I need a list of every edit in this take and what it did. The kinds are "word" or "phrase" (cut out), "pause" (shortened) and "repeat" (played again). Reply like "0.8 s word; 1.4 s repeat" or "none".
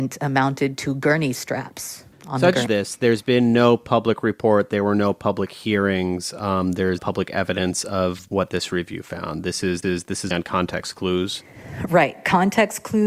2.1 s pause; 2.7 s phrase; 7.0 s phrase; 8.3 s word; 9.8 s repeat; 10.3 s word

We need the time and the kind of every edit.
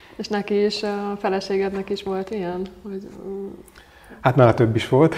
none

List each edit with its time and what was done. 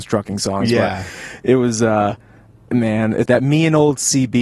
2.7 s word; 3.3 s word

